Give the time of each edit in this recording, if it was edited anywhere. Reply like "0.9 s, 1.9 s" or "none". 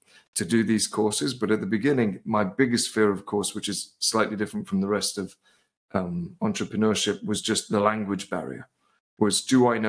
none